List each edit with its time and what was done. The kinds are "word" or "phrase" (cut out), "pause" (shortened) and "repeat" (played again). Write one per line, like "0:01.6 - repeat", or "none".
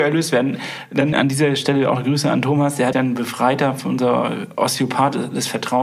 0:01.1 - word
0:02.9 - word